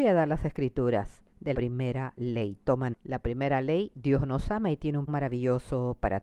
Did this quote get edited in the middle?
yes; 3 cuts; at 1.5 s, 2.9 s, 5.1 s

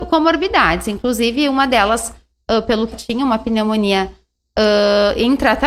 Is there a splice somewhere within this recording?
yes; 1 cut; at 2.9 s

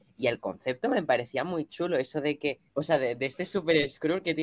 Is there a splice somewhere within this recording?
yes; 1 cut; at 2.7 s

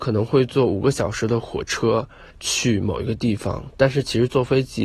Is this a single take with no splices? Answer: no; 1 cut; at 2.3 s

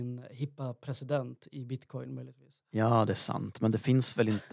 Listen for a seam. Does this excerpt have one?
yes; 1 cut; at 1.5 s

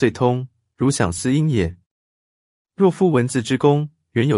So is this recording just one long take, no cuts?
yes; 0 cuts

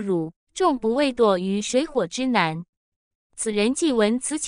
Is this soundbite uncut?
yes; 0 cuts

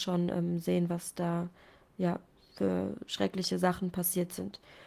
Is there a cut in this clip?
no; 0 cuts

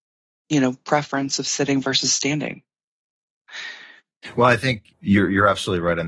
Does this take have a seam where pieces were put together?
no; 0 cuts

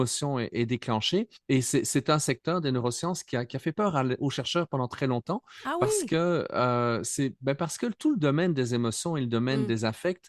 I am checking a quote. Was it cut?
yes; 1 cut; at 1.4 s

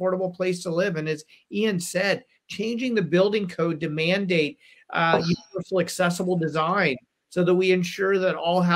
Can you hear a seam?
no; 0 cuts

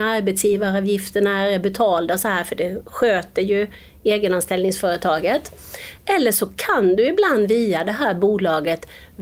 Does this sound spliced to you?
no; 0 cuts

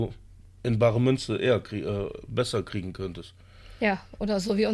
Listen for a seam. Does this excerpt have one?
no; 0 cuts

